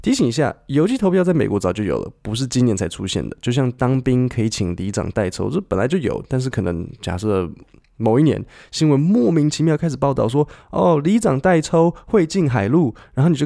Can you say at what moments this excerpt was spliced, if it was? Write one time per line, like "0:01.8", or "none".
none